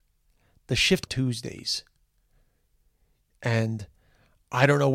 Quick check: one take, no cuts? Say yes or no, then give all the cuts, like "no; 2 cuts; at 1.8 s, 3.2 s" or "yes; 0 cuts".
no; 1 cut; at 1.1 s